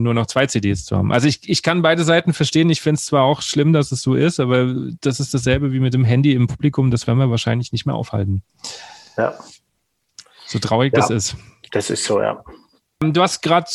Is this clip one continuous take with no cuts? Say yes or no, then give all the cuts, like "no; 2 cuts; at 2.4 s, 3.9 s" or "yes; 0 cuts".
yes; 0 cuts